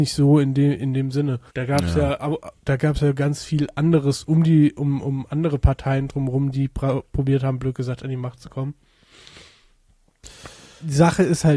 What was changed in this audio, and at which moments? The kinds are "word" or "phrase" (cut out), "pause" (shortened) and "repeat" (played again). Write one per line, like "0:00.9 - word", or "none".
0:01.5 - pause
0:02.6 - pause